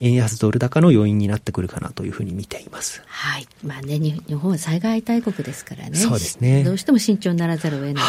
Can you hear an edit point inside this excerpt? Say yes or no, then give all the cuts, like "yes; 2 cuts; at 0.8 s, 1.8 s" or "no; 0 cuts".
yes; 1 cut; at 3.1 s